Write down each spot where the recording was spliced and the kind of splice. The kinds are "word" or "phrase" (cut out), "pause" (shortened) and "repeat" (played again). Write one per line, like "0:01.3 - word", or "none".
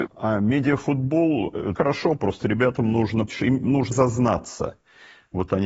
0:01.8 - word
0:03.3 - word
0:03.9 - word